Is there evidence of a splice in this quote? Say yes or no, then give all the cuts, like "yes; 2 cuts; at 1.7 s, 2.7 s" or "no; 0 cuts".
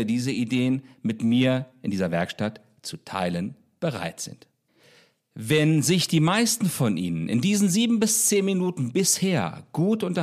no; 0 cuts